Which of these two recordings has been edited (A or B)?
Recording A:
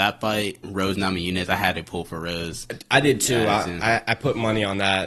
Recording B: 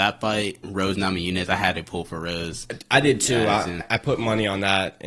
B